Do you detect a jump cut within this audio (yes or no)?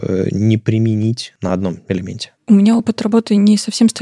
no